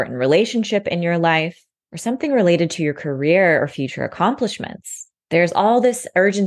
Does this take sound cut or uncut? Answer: uncut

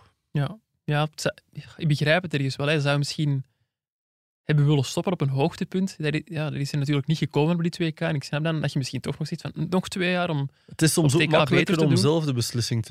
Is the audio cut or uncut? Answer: uncut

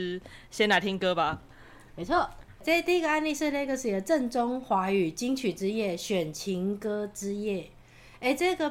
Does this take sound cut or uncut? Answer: uncut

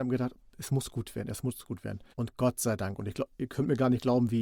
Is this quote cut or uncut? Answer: cut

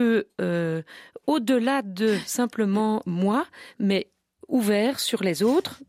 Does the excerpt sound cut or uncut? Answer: uncut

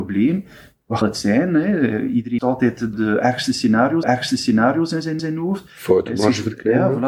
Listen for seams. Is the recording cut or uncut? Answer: cut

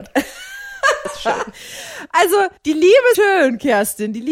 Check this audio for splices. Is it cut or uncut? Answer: cut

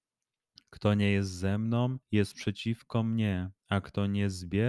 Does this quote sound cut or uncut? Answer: cut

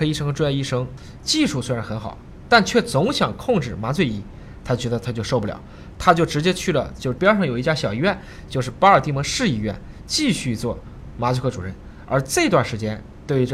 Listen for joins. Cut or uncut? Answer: cut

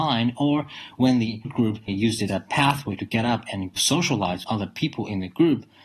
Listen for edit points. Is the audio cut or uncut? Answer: cut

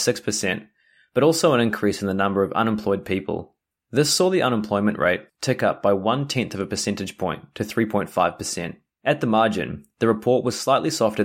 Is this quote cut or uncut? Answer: uncut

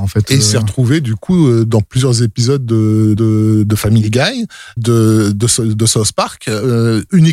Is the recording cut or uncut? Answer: cut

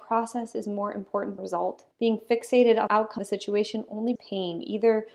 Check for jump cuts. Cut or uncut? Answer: cut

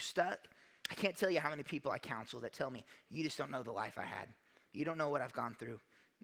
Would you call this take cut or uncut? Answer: uncut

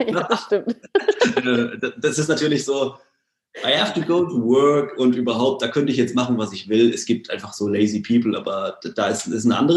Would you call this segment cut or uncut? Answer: uncut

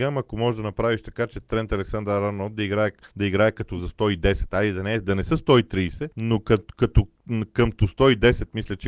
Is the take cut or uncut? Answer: cut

